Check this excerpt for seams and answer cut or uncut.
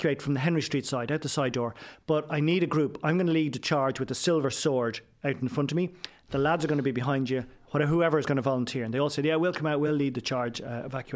uncut